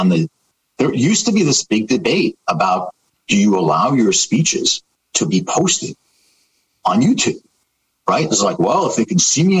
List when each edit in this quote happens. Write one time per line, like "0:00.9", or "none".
none

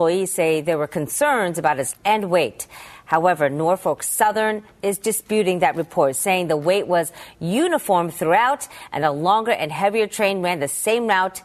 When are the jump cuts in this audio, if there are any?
0:01.9

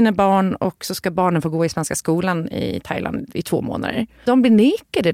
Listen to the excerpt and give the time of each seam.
none

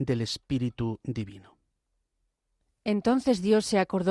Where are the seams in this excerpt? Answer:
none

